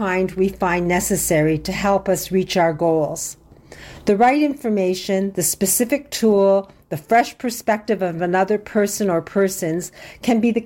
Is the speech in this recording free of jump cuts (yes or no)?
yes